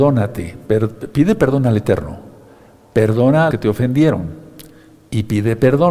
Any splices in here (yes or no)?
yes